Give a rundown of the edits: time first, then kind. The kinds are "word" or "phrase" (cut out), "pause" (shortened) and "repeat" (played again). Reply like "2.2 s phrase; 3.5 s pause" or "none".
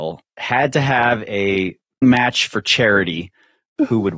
2.0 s word